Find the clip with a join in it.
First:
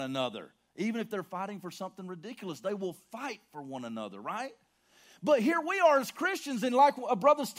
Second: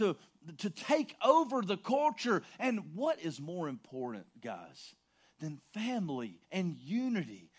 second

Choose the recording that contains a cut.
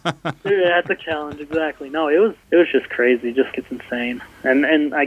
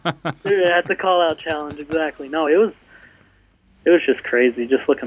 first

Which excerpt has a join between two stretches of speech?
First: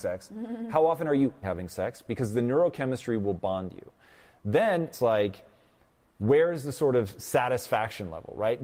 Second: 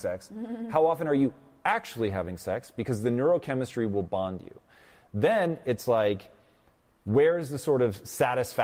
first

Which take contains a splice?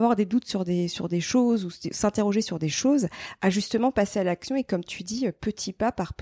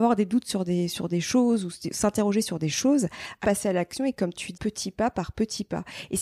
second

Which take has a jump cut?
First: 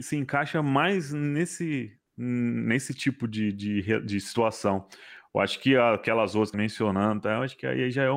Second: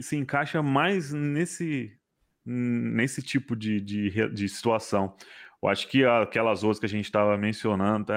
first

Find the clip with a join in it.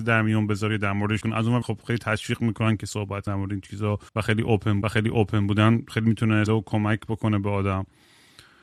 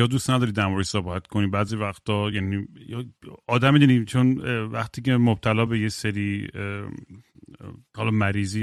first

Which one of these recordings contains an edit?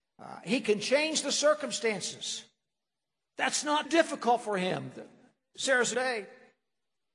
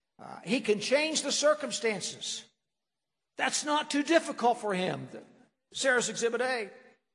first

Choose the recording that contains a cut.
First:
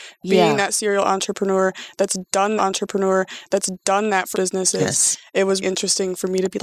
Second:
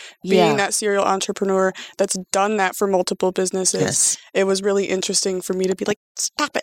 first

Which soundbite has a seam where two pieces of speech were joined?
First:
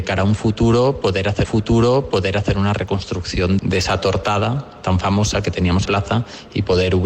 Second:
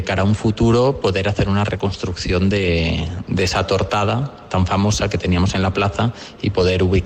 first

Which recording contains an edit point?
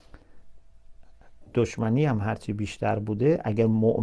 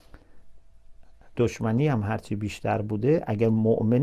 second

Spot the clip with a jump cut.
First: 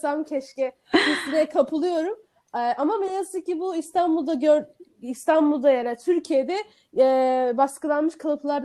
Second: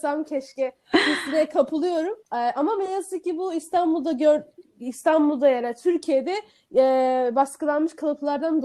second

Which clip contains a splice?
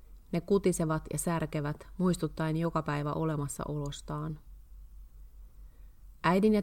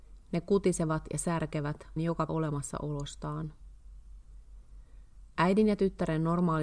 second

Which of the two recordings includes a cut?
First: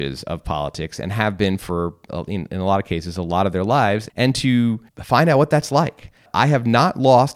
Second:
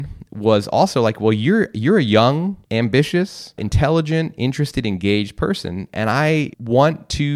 second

